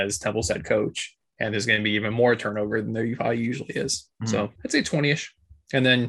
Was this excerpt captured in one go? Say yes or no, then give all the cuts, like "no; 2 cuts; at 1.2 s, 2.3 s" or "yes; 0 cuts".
no; 1 cut; at 4.6 s